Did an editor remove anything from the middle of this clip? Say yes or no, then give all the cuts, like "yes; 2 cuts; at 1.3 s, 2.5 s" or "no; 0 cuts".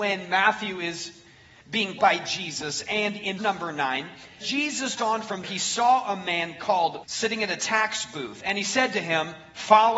yes; 6 cuts; at 2.0 s, 3.4 s, 4.4 s, 5.0 s, 5.4 s, 7.0 s